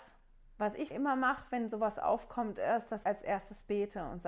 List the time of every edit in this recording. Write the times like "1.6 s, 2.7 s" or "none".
0.9 s, 3.0 s